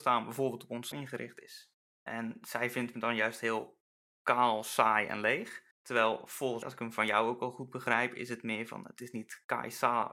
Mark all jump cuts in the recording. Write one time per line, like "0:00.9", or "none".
0:00.9
0:01.8
0:02.9
0:05.7
0:06.6